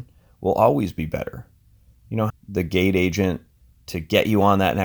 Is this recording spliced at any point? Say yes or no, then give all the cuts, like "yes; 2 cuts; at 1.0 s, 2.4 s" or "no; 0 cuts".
yes; 1 cut; at 2.3 s